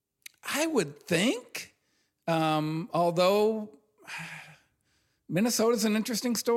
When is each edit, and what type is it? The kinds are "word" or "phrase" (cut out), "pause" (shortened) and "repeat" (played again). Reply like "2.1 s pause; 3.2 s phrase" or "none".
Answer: none